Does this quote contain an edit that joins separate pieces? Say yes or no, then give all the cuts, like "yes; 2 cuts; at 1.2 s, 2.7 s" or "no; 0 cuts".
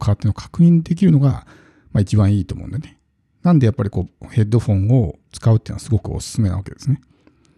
no; 0 cuts